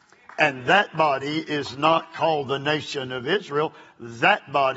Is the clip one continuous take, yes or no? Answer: yes